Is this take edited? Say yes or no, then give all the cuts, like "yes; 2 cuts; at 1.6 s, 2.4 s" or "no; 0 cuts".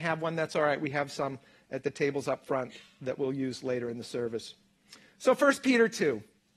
no; 0 cuts